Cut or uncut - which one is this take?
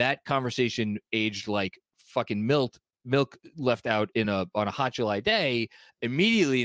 uncut